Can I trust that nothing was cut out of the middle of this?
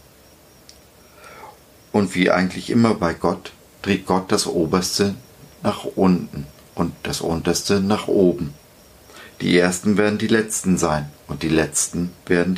yes; 0 cuts

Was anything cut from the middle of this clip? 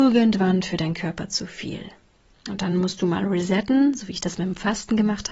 no; 0 cuts

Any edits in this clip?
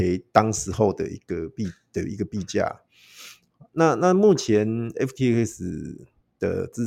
no; 0 cuts

